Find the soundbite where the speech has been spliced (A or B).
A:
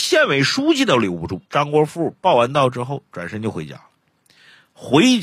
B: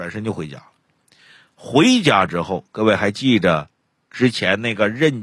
A